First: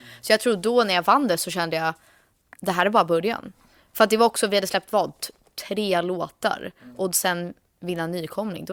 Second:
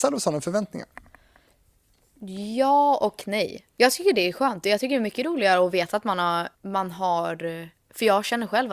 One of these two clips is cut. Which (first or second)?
second